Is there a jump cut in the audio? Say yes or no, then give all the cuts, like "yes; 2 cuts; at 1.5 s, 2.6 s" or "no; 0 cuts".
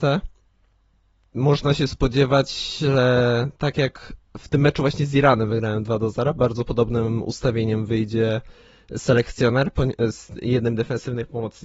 no; 0 cuts